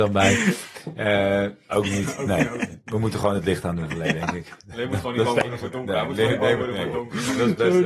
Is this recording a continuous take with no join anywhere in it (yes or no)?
yes